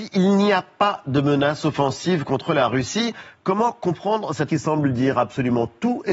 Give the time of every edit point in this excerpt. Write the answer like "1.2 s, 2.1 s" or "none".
4.5 s